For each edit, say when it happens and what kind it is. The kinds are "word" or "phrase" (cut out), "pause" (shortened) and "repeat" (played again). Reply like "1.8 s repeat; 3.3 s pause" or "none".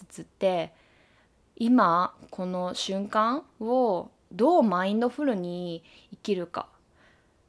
none